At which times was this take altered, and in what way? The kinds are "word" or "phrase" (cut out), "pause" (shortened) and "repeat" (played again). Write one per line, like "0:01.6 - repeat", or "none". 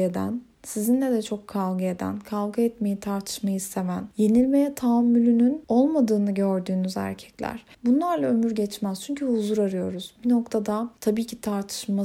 0:07.7 - pause